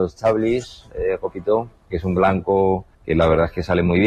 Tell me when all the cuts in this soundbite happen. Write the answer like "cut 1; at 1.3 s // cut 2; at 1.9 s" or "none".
cut 1; at 1.9 s // cut 2; at 2.9 s